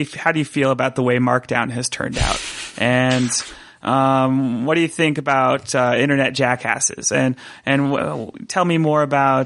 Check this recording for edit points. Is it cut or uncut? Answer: uncut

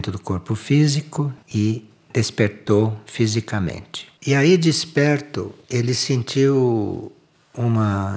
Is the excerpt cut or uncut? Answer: cut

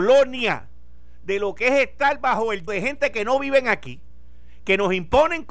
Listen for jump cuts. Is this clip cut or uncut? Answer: cut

